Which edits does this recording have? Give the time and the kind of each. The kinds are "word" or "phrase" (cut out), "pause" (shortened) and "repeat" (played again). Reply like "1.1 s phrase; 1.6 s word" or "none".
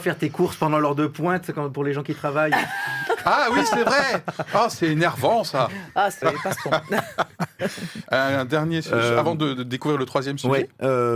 6.2 s phrase